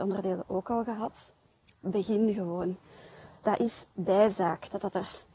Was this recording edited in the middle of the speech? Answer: no; 0 cuts

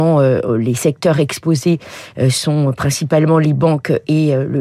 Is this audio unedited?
yes; 0 cuts

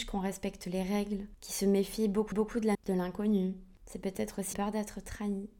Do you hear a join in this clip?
yes; 3 cuts; at 2.3 s, 2.7 s, 4.5 s

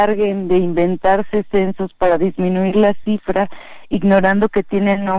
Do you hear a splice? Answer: no; 0 cuts

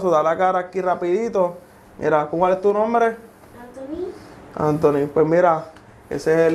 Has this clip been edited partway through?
no; 0 cuts

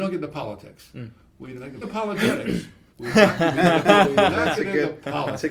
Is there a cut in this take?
yes; 2 cuts; at 1.8 s, 2.9 s

